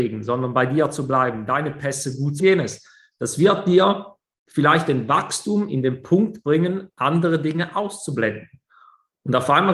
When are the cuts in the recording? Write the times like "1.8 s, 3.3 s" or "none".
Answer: 2.4 s